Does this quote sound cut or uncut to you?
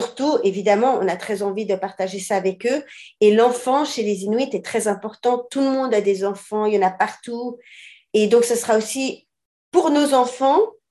uncut